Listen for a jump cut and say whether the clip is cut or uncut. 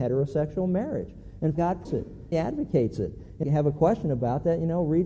cut